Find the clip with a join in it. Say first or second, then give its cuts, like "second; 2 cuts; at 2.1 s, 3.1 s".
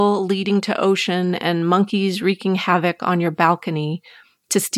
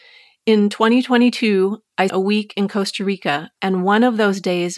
second; 1 cut; at 2.1 s